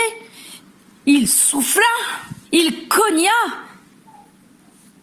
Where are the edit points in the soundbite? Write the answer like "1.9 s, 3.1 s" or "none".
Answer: 2.5 s